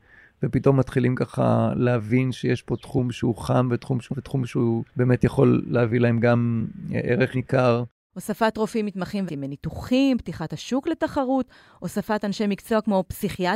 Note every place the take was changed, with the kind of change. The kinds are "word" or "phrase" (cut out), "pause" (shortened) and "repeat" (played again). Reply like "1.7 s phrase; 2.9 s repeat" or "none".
4.1 s word; 4.9 s pause; 7.3 s word; 9.3 s phrase